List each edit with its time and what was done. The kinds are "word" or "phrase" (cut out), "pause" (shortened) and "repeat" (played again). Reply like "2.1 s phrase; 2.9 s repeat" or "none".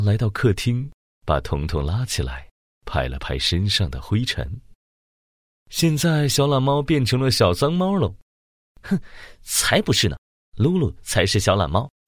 none